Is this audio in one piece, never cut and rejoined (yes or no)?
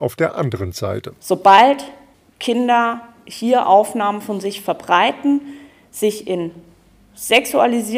yes